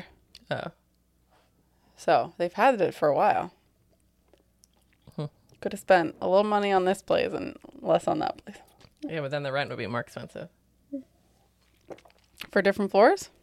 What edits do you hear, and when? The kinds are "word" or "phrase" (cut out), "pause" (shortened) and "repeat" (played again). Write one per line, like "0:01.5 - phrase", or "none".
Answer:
none